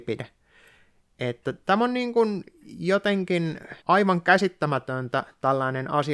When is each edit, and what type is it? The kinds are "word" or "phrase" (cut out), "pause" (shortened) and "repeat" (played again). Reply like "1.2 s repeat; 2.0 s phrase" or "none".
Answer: 3.8 s pause